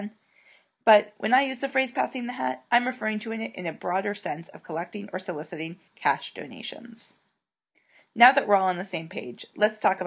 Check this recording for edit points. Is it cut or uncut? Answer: uncut